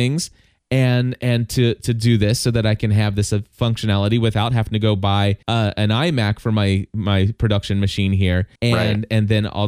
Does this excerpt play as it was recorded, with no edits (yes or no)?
no